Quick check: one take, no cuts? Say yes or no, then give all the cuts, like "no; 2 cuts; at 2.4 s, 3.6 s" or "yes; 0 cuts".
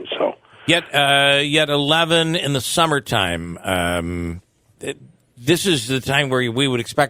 no; 1 cut; at 4.8 s